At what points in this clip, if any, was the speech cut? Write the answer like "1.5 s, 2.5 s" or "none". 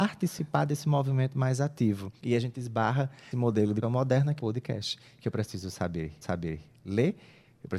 2.2 s, 3.3 s, 3.8 s, 4.4 s, 6.2 s